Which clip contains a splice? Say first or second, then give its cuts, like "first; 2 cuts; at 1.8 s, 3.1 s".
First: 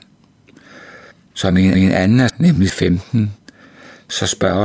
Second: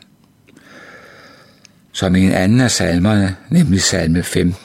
first; 4 cuts; at 1.1 s, 1.7 s, 2.3 s, 2.7 s